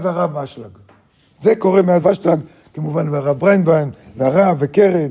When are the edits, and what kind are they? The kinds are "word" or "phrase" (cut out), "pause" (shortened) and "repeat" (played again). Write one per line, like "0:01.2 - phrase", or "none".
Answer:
0:02.0 - word